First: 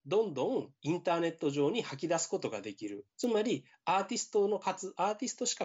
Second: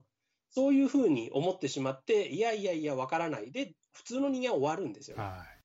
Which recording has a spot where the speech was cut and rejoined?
first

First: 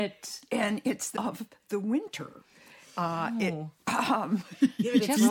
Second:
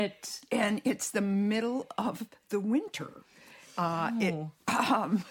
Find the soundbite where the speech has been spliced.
first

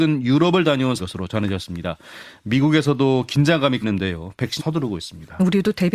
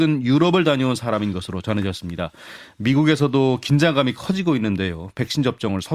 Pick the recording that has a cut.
first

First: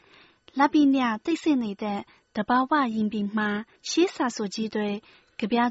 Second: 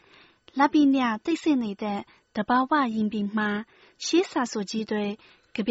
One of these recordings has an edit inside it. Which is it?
first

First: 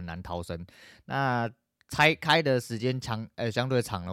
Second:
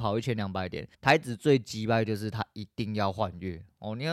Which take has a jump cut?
second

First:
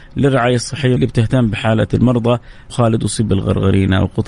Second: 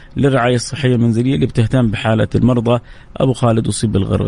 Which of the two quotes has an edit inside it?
first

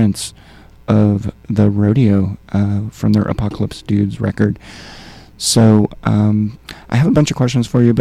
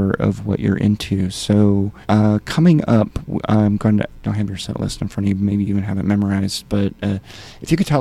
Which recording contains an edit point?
second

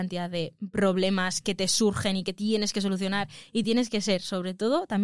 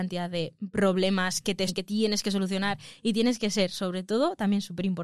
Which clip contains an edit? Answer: second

